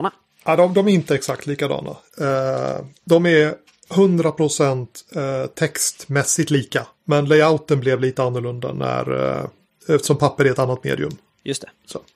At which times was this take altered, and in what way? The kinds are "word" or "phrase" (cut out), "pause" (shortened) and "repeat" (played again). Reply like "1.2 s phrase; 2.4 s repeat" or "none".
3.0 s pause; 6.9 s pause; 9.7 s pause